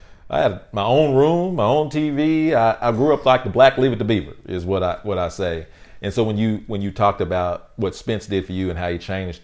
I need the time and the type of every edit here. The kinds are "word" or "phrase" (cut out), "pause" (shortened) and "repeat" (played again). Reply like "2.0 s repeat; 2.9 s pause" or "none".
none